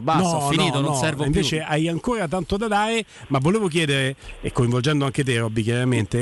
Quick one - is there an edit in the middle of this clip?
no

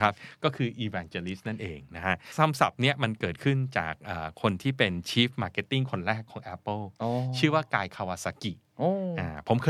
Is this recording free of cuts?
yes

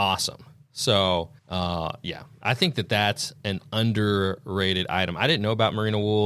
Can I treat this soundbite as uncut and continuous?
no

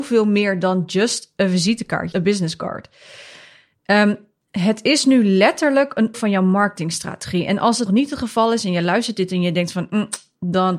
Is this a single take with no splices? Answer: no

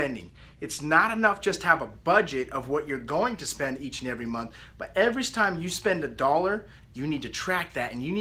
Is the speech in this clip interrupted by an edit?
no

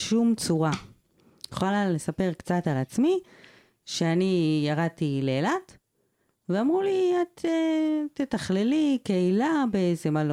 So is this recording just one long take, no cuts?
yes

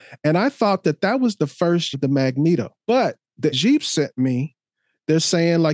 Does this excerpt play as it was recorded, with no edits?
no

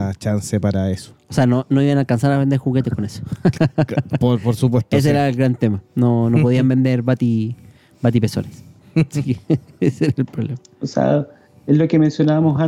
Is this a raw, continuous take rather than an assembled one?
yes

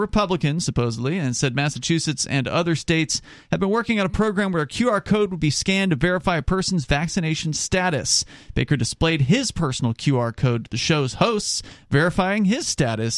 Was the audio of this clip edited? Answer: no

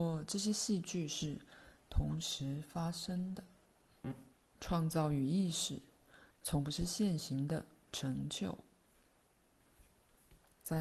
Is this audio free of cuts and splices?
no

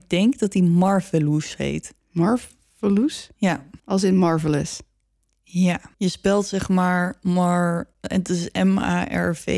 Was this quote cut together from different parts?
yes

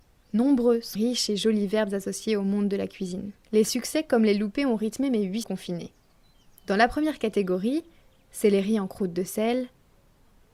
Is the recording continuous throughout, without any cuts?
no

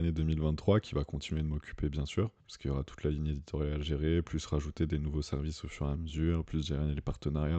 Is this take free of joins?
no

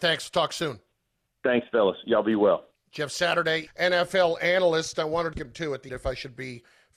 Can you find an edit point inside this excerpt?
yes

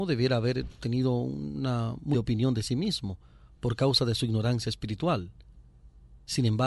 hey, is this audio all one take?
no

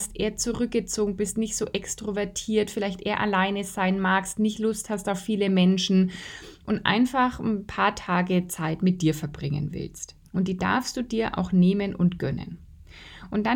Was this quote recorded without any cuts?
no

